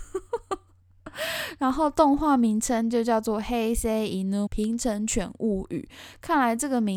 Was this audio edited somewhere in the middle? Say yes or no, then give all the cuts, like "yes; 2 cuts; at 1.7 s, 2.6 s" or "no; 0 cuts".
yes; 1 cut; at 4.5 s